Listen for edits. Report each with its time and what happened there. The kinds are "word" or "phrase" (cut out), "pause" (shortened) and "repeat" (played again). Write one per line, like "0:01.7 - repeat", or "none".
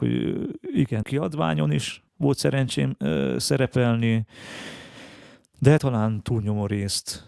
0:01.0 - word
0:02.1 - pause
0:05.8 - word